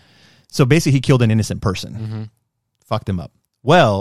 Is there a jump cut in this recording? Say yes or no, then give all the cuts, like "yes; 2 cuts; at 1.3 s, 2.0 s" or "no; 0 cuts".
no; 0 cuts